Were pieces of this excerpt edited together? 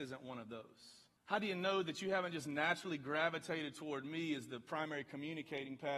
yes; 1 cut; at 1.2 s

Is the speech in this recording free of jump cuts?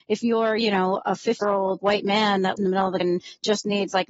no; 4 cuts; at 1.4 s, 1.8 s, 2.6 s, 3.0 s

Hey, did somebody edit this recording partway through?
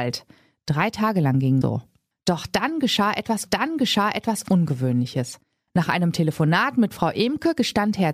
yes; 2 cuts; at 1.6 s, 3.5 s

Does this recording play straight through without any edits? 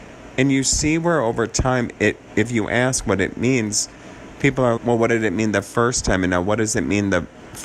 no; 1 cut; at 4.8 s

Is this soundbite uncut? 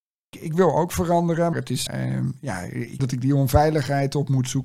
no; 3 cuts; at 1.5 s, 1.9 s, 3.0 s

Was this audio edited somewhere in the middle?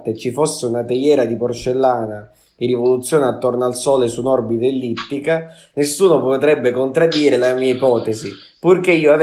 no; 0 cuts

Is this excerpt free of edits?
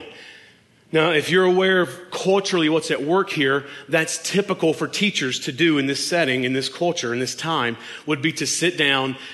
yes; 0 cuts

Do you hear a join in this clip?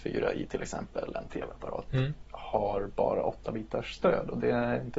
yes; 1 cut; at 2.2 s

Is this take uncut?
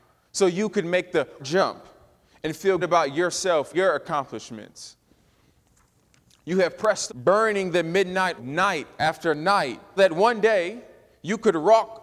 no; 6 cuts; at 1.4 s, 2.8 s, 3.7 s, 7.1 s, 8.4 s, 10.0 s

